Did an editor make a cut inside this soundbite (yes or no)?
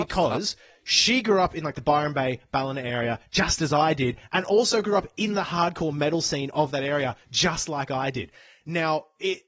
no